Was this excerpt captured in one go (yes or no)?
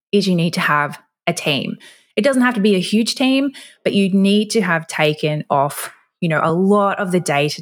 yes